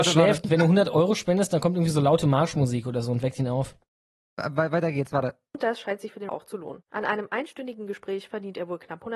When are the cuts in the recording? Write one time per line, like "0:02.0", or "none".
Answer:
0:06.3

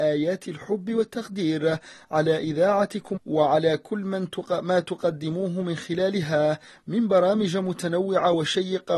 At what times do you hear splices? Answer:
0:03.2

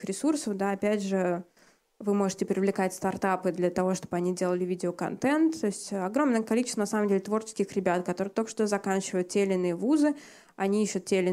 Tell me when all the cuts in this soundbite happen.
none

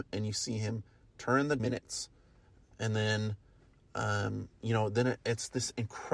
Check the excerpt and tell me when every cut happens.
0:01.6

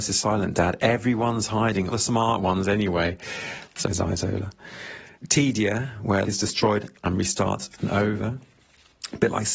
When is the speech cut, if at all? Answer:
0:01.9
0:03.8
0:05.1
0:06.2
0:07.8

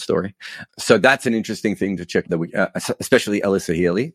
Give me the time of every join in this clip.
0:02.2

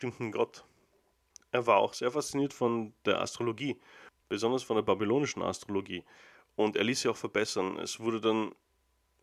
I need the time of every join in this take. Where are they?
none

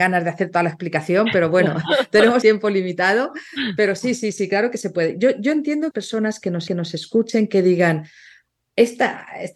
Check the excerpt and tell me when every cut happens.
0:02.4
0:05.9
0:06.7

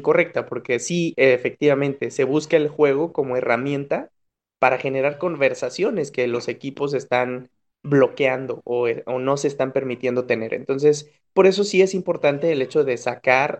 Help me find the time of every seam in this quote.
none

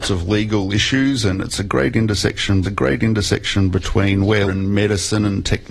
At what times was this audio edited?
0:02.6
0:04.5

